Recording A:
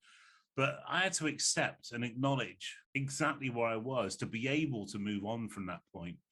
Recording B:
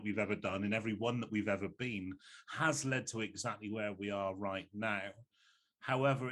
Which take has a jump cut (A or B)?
A